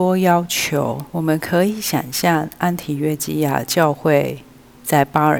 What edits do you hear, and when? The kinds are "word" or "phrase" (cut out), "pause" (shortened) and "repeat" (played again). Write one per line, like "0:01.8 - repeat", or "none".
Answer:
0:01.1 - pause